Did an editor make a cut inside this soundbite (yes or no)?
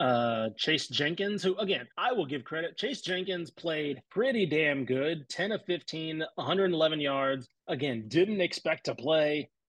yes